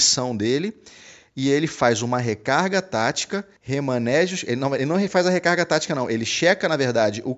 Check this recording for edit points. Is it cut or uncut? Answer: cut